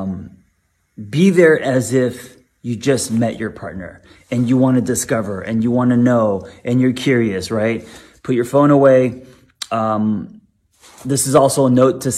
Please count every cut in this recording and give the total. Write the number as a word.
zero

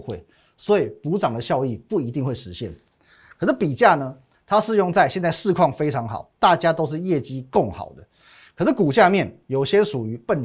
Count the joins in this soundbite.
zero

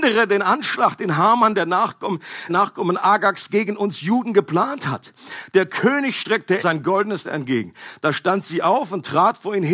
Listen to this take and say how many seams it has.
three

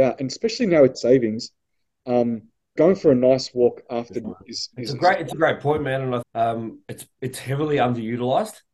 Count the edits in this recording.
six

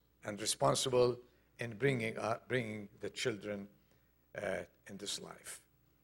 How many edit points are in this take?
zero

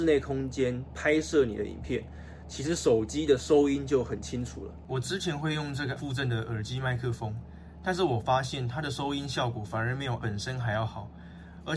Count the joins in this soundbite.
two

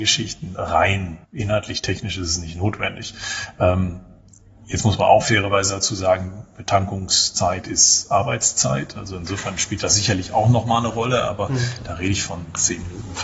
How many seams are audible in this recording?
one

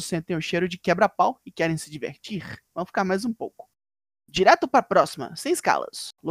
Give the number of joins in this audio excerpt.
zero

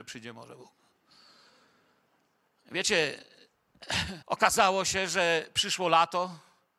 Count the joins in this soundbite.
one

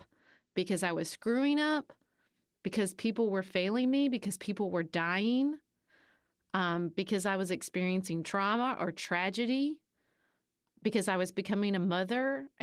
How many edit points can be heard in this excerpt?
zero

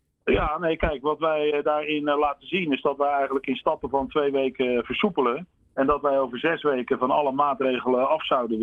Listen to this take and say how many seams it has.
one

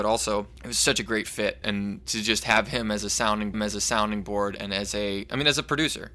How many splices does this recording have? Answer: two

